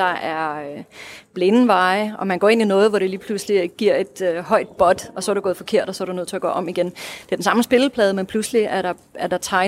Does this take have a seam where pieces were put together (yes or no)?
no